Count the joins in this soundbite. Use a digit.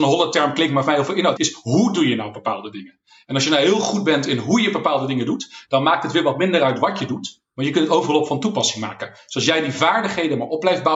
1